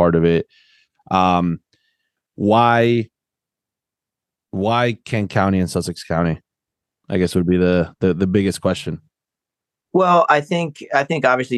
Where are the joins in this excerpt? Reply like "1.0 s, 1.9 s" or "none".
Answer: none